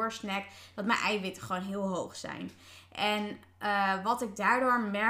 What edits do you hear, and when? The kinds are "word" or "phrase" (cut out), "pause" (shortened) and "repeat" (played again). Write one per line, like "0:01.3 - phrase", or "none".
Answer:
none